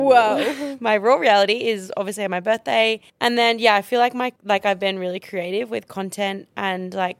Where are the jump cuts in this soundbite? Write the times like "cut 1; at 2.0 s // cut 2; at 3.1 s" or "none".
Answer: cut 1; at 3.1 s // cut 2; at 4.4 s